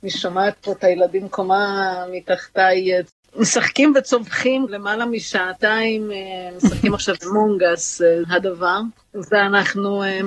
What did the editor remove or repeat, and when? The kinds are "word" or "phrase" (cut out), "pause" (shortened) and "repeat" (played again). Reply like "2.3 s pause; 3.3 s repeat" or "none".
4.7 s word; 8.2 s word